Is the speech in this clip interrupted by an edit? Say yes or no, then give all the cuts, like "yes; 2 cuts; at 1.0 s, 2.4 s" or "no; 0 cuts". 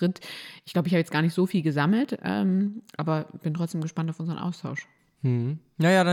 no; 0 cuts